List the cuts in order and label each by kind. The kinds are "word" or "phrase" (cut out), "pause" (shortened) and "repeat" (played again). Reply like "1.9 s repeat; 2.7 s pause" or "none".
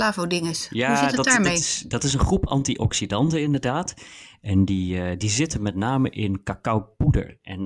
none